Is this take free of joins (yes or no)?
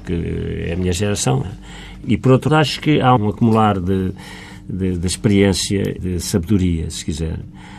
no